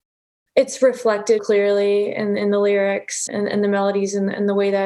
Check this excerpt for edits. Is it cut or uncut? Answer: cut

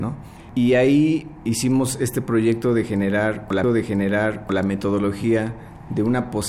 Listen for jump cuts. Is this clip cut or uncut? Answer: cut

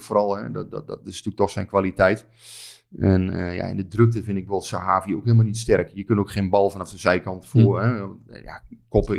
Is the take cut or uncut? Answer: uncut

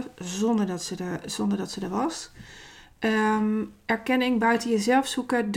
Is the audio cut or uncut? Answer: uncut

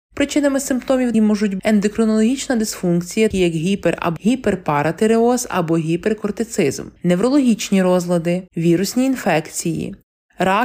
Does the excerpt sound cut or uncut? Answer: cut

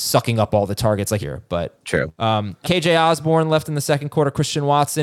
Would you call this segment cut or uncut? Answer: cut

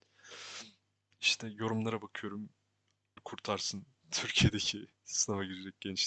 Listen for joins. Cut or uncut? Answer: cut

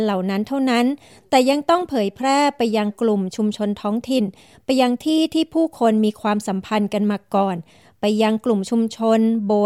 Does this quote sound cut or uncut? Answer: uncut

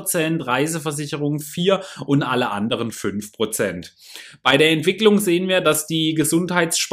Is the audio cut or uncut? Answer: uncut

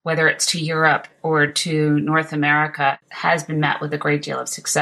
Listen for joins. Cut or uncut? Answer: uncut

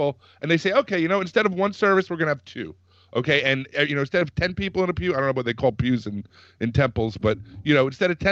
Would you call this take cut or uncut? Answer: uncut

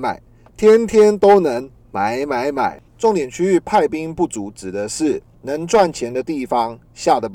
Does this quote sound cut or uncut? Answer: cut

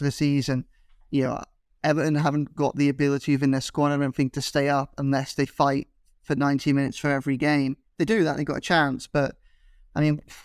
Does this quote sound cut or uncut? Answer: uncut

